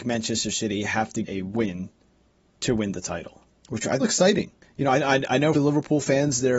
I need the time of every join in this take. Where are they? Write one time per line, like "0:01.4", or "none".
0:01.2
0:03.5
0:04.0
0:04.6
0:05.5